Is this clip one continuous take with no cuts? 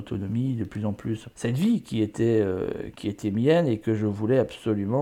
no; 2 cuts; at 1.3 s, 2.9 s

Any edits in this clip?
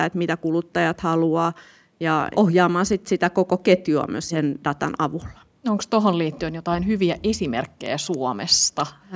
no; 0 cuts

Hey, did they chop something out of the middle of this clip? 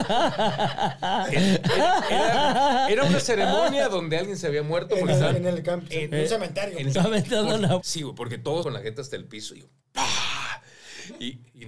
yes; 3 cuts; at 6.9 s, 7.8 s, 8.6 s

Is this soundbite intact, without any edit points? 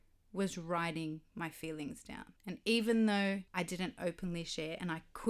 no; 3 cuts; at 1.3 s, 2.4 s, 3.5 s

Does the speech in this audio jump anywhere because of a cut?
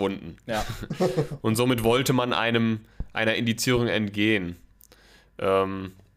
no; 0 cuts

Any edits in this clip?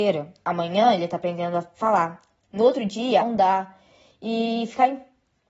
yes; 1 cut; at 3.2 s

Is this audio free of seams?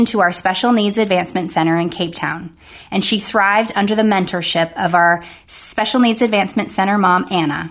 yes; 0 cuts

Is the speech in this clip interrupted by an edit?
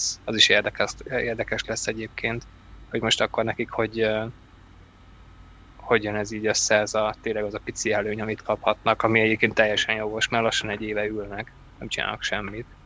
no; 0 cuts

